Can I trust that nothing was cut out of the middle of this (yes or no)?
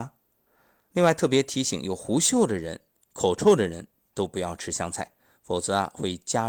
yes